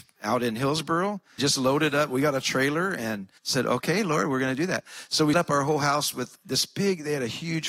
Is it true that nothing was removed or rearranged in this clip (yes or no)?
no